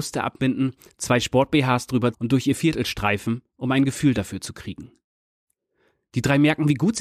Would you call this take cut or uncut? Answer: cut